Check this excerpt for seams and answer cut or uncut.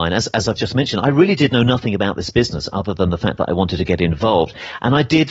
uncut